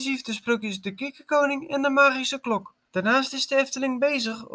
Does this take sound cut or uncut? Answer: cut